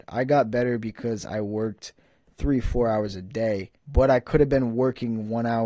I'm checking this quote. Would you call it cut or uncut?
cut